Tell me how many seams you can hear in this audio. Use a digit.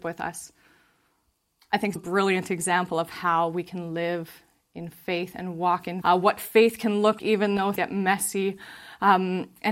4